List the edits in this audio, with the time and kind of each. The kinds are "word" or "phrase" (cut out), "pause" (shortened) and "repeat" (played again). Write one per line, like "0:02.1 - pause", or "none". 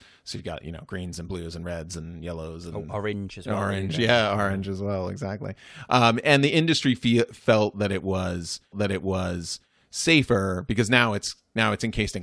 0:08.7 - repeat